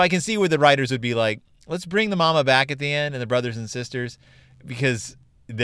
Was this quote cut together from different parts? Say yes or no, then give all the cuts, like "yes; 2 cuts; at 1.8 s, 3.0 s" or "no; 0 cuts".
no; 0 cuts